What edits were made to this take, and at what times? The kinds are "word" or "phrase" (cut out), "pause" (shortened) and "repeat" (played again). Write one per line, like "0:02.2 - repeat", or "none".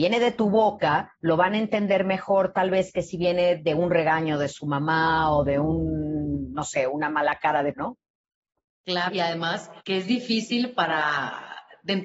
0:01.1 - pause
0:07.7 - word
0:09.1 - word
0:09.8 - pause